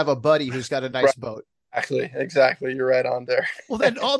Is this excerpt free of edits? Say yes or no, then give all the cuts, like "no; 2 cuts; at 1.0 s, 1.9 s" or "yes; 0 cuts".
no; 1 cut; at 3.3 s